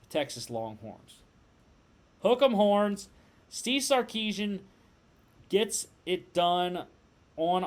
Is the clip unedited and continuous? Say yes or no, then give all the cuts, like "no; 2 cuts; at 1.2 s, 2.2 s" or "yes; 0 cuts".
yes; 0 cuts